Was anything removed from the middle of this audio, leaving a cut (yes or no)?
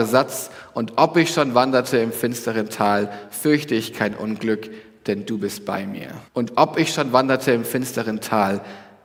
yes